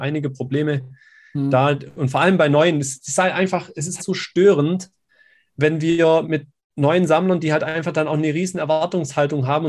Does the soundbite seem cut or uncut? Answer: cut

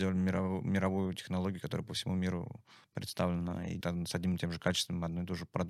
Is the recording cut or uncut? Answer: cut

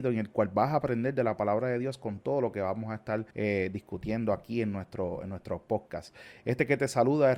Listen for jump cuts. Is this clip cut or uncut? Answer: cut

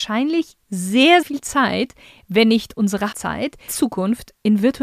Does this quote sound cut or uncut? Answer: cut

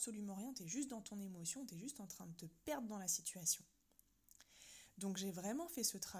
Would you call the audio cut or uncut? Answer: uncut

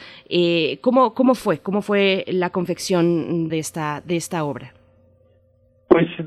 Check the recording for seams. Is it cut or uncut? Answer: cut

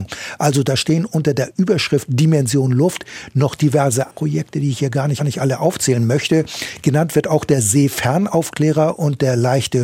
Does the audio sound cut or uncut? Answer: cut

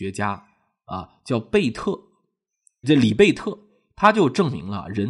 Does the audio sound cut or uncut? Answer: cut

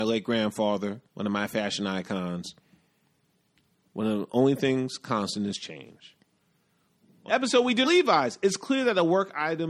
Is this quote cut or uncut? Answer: cut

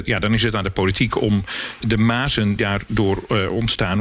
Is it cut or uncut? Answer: cut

